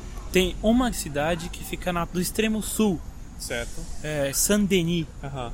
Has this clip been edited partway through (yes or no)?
yes